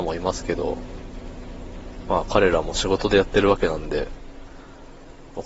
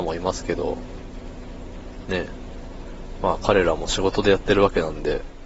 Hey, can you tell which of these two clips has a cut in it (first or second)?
first